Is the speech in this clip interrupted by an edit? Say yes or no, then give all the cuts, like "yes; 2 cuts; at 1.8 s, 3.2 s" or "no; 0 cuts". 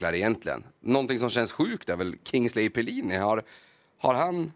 no; 0 cuts